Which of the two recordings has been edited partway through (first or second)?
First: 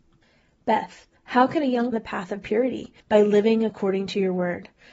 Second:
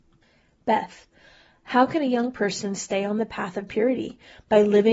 first